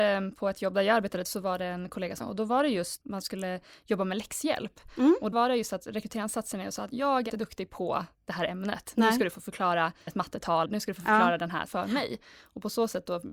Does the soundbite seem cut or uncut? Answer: cut